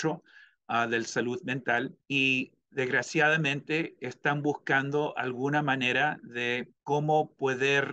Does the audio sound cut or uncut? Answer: cut